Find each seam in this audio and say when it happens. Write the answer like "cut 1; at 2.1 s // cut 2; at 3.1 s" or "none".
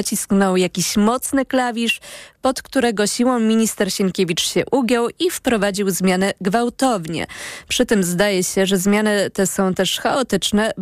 none